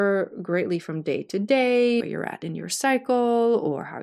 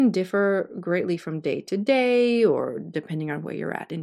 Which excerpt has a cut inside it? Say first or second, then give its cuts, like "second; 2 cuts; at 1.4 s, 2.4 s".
first; 1 cut; at 2.0 s